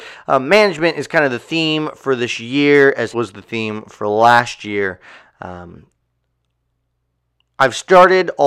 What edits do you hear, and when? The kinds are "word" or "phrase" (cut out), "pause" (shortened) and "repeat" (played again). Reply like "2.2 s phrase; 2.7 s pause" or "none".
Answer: 3.1 s word